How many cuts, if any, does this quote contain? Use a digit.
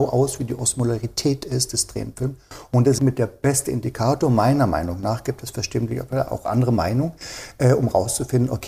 1